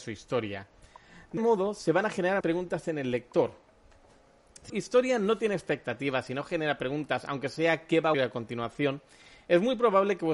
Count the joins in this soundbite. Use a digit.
4